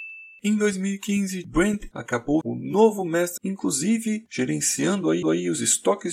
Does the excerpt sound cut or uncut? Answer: cut